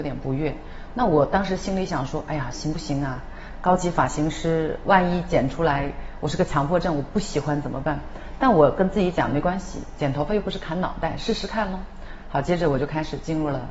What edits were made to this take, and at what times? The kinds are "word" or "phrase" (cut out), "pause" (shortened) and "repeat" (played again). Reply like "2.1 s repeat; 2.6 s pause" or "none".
none